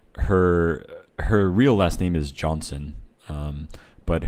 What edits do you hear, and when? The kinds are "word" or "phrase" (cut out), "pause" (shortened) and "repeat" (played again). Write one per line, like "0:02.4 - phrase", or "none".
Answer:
0:01.1 - pause